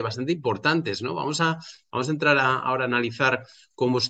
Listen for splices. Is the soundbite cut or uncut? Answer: uncut